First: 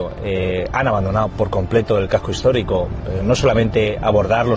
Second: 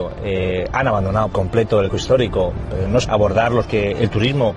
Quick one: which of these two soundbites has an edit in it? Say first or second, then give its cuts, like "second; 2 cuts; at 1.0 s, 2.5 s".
second; 4 cuts; at 1.3 s, 1.9 s, 3.0 s, 3.7 s